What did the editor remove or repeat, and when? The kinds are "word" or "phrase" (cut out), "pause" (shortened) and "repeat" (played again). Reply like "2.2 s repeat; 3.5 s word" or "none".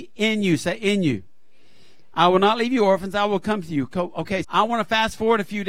4.4 s word